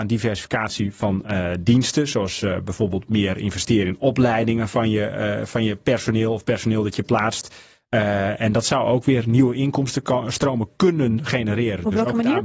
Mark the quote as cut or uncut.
uncut